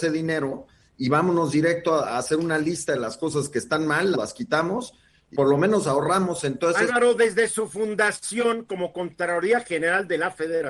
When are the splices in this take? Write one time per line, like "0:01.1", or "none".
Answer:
0:04.1
0:05.3